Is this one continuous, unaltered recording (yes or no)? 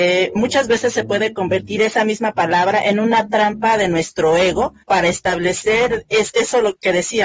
no